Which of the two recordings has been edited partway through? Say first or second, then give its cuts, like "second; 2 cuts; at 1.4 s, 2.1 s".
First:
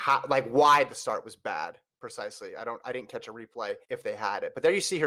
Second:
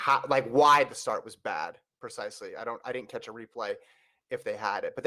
first; 1 cut; at 3.8 s